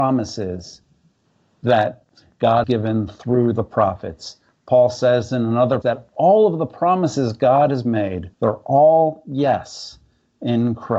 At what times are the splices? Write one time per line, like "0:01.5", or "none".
0:02.6
0:05.8
0:08.3